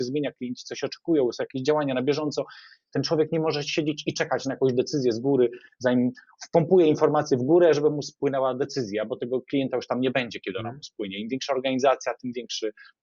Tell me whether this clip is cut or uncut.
uncut